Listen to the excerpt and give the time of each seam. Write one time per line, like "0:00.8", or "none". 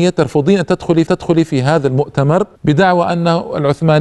0:01.1
0:02.6